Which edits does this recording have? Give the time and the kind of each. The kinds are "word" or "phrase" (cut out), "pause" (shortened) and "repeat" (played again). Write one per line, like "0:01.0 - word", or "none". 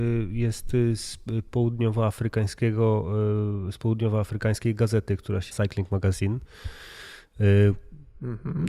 0:05.5 - word